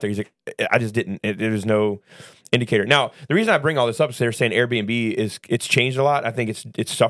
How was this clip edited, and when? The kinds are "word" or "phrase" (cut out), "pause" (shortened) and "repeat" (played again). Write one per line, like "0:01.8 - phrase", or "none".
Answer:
none